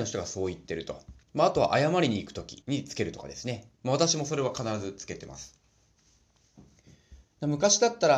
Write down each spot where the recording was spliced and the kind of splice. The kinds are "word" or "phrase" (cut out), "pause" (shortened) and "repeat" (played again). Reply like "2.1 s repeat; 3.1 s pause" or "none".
1.2 s pause; 2.6 s pause